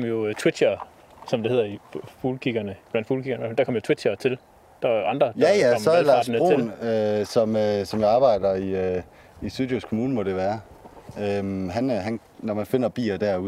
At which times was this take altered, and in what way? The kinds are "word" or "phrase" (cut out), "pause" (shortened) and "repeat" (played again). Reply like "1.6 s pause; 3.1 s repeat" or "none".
none

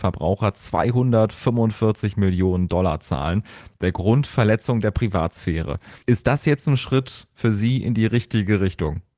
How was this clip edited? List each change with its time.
6.0 s pause

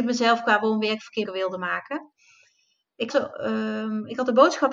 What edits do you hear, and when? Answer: 1.2 s word; 3.1 s word

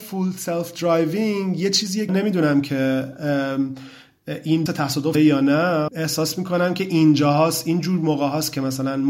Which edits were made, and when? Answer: 2.1 s phrase; 4.7 s word; 5.1 s word; 5.9 s word

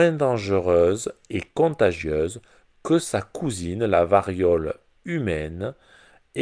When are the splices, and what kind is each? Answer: none

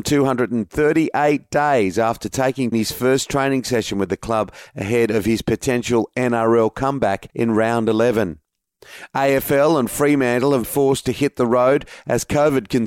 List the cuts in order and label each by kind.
2.7 s phrase; 7.3 s pause; 10.6 s word

